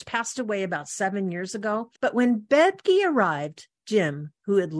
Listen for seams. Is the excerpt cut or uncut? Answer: cut